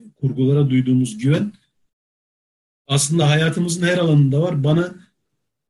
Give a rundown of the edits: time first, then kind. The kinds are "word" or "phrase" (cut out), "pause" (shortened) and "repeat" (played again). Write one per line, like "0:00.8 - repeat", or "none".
none